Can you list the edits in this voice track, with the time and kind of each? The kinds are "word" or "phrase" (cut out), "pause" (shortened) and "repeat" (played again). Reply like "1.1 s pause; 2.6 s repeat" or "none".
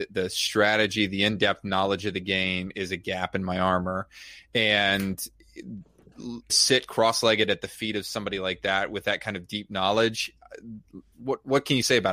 6.5 s phrase

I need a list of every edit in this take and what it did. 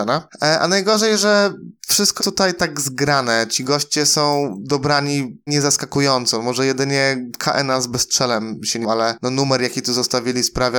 2.2 s word; 5.5 s word; 8.8 s word

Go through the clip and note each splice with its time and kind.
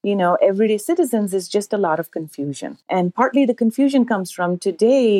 2.8 s pause

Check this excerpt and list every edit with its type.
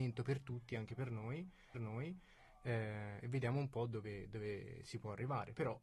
1.7 s repeat

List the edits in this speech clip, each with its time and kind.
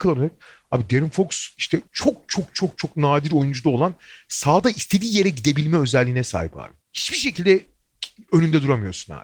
1.9 s pause; 2.8 s word; 6.8 s pause

